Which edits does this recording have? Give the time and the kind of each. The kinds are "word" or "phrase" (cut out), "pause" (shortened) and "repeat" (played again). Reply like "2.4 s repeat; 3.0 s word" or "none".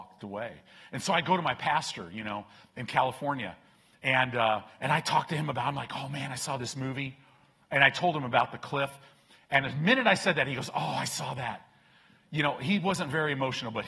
none

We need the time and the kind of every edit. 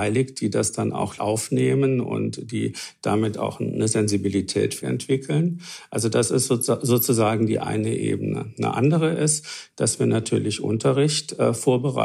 1.2 s word; 4.8 s word

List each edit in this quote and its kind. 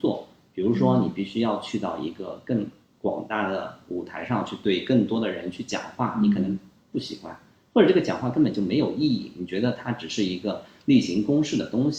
none

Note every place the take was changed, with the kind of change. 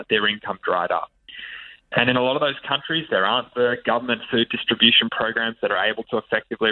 none

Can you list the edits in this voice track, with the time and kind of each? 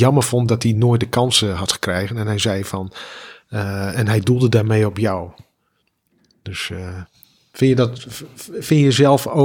none

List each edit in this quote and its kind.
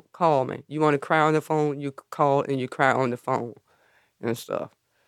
none

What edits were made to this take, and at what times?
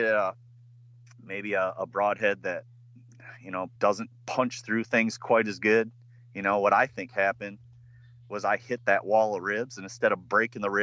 3.8 s pause; 6.2 s pause

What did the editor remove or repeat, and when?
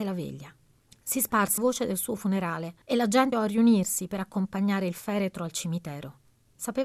1.6 s word; 2.8 s pause; 3.3 s word

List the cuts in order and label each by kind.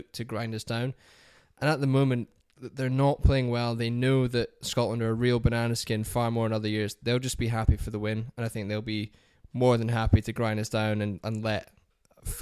none

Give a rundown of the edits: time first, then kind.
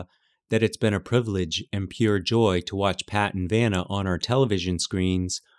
none

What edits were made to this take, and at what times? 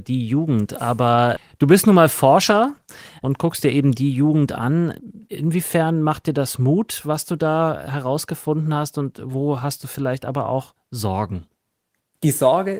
none

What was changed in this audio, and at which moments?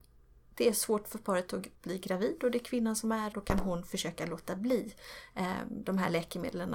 1.8 s pause; 3.3 s word

